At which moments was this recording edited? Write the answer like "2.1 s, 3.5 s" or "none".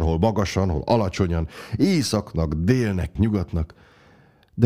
3.2 s